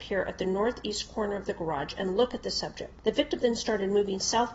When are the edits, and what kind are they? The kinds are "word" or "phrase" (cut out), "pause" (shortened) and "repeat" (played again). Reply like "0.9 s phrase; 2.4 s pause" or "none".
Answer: none